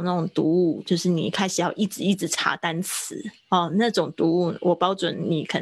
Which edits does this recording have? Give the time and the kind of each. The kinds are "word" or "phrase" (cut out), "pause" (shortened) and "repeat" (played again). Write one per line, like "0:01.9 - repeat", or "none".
0:03.4 - pause